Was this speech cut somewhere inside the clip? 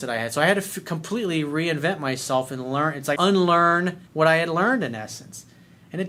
yes; 2 cuts; at 3.2 s, 4.1 s

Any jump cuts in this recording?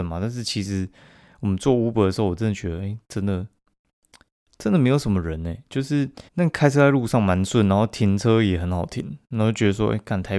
yes; 1 cut; at 6.3 s

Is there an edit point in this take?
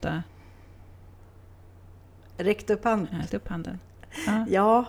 yes; 1 cut; at 3.3 s

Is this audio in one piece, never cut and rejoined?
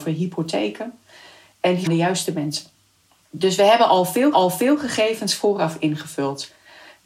no; 2 cuts; at 1.9 s, 4.3 s

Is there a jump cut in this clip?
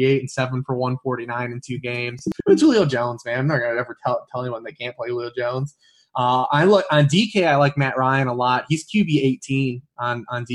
no; 0 cuts

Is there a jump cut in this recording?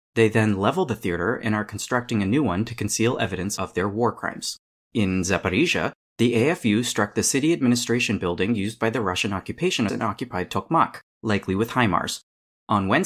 yes; 1 cut; at 9.9 s

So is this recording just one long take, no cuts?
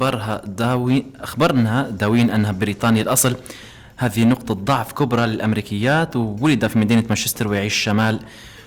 yes; 0 cuts

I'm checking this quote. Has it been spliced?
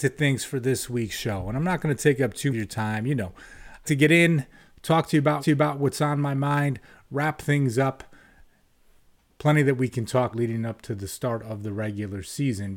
yes; 4 cuts; at 2.5 s, 3.8 s, 5.4 s, 10.3 s

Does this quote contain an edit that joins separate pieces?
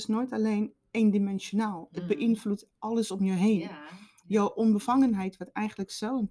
no; 0 cuts

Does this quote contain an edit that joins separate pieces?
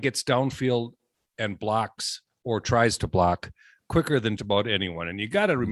yes; 1 cut; at 4.4 s

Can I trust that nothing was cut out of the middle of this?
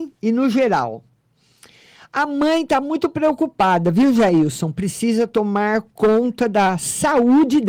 yes; 0 cuts

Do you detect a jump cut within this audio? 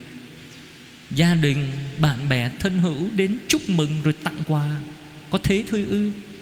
no; 0 cuts

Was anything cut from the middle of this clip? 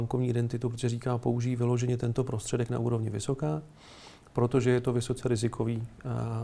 no; 0 cuts

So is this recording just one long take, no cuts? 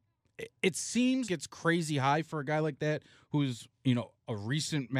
no; 1 cut; at 1.3 s

